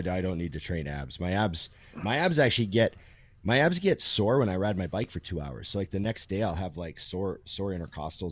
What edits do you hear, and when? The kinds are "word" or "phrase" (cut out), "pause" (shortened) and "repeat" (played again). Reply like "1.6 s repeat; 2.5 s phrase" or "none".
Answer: none